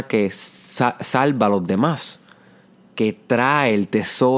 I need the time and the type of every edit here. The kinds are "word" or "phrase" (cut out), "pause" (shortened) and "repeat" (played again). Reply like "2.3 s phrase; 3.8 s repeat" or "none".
none

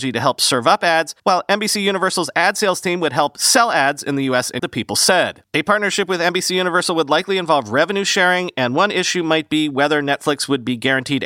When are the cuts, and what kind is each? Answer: 1.2 s pause; 4.6 s word; 5.5 s pause

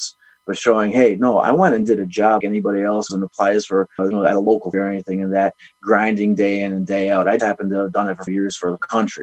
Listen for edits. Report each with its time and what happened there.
2.4 s word; 3.1 s word; 4.0 s word; 4.7 s word; 7.4 s word; 8.3 s word

